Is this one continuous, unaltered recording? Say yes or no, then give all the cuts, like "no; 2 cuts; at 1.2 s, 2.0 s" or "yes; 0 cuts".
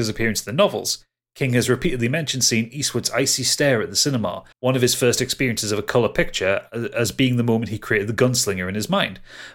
no; 1 cut; at 4.5 s